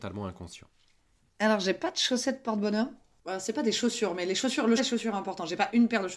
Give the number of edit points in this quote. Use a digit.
1